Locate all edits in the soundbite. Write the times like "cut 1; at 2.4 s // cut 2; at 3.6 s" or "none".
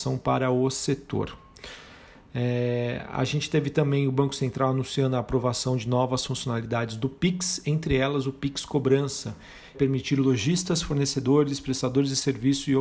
cut 1; at 9.7 s